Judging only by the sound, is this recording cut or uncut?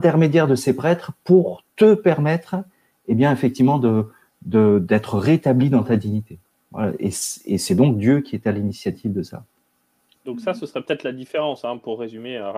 uncut